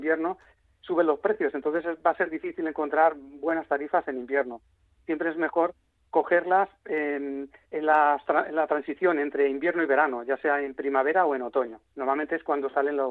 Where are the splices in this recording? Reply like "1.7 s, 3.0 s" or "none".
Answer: 7.6 s